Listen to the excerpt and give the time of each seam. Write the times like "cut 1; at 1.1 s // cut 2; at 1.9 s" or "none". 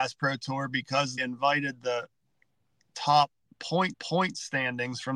cut 1; at 1.2 s // cut 2; at 3.9 s